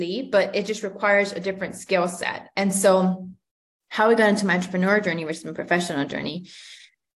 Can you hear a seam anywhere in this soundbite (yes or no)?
no